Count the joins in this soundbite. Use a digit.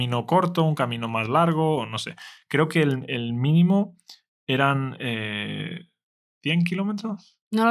0